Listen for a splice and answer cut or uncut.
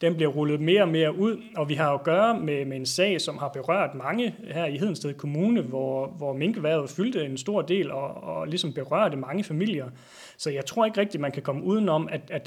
uncut